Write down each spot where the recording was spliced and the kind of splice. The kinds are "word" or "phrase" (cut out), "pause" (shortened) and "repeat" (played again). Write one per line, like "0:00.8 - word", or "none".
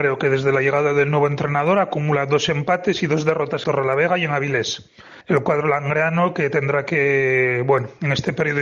0:03.6 - phrase
0:05.2 - pause